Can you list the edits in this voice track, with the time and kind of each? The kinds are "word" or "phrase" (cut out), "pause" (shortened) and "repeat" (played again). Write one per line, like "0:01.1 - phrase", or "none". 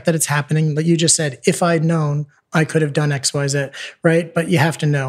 none